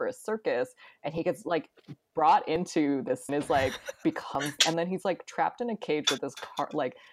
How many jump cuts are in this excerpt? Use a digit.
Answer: 2